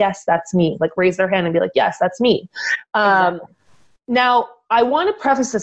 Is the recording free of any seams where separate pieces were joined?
yes; 0 cuts

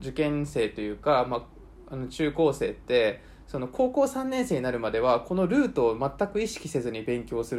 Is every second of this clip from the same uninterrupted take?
yes; 0 cuts

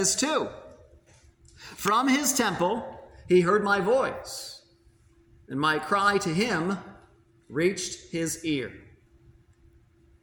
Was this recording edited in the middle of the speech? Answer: no; 0 cuts

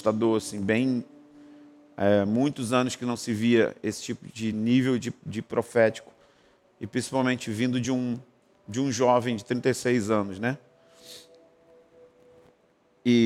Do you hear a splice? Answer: no; 0 cuts

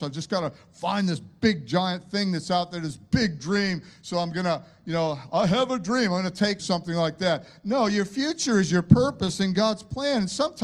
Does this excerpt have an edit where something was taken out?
yes; 1 cut; at 6.6 s

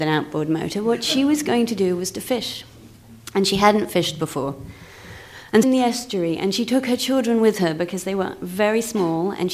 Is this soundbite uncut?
no; 1 cut; at 5.6 s

